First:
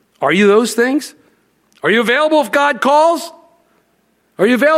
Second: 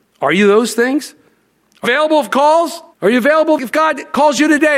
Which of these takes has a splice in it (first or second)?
second